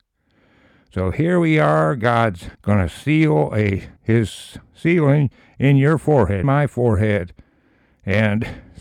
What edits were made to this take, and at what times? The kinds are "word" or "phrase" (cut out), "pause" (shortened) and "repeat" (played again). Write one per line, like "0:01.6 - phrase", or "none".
0:02.5 - pause
0:04.0 - pause
0:06.4 - word